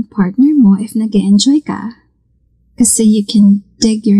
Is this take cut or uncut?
uncut